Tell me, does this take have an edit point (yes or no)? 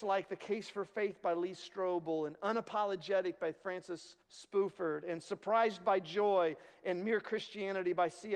yes